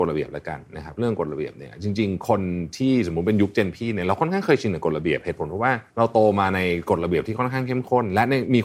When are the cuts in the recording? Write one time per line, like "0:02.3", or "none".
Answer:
0:05.9